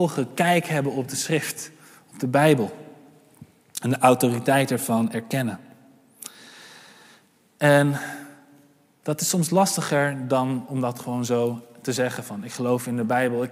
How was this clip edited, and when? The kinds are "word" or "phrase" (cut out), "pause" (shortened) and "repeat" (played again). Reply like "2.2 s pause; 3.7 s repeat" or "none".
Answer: none

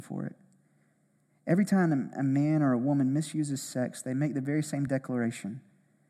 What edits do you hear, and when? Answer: none

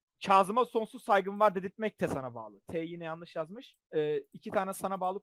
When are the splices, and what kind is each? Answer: 3.8 s pause

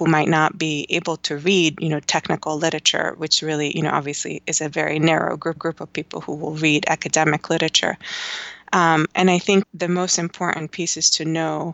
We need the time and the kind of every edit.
5.6 s repeat; 9.6 s phrase

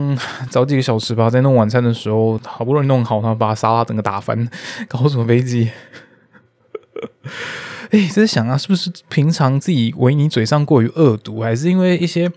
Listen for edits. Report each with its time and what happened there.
none

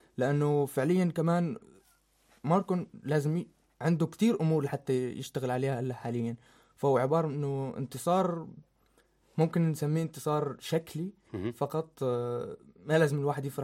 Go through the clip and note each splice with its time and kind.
none

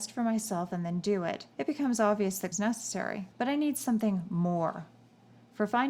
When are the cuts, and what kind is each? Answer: 1.5 s pause; 2.5 s phrase; 3.3 s pause

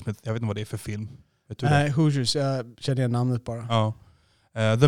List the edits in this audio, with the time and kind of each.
none

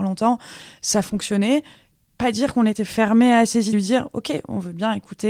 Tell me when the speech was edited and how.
3.7 s phrase

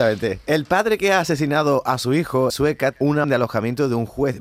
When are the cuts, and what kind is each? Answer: 2.5 s word; 2.9 s word; 3.2 s word

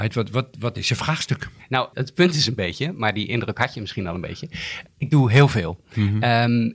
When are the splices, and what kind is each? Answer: 1.9 s word

